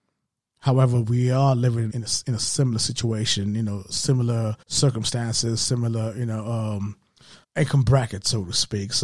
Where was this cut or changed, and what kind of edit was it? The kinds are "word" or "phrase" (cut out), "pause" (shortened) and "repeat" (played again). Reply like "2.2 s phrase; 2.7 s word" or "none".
1.9 s phrase; 4.6 s pause; 7.4 s pause